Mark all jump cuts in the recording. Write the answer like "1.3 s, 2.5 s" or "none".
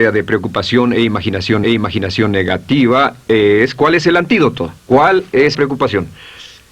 1.6 s, 4.8 s, 5.5 s